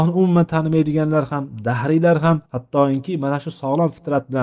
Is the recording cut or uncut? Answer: cut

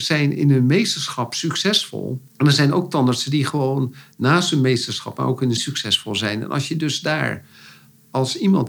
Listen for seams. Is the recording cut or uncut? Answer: cut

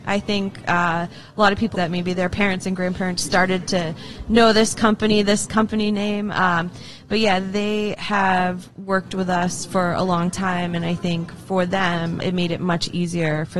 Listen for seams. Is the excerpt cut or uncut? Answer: cut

